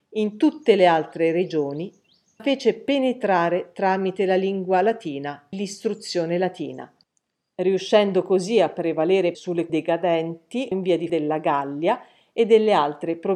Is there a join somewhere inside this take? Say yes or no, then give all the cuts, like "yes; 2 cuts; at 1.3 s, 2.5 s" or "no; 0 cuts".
yes; 6 cuts; at 2.4 s, 5.5 s, 9.3 s, 9.7 s, 10.7 s, 11.1 s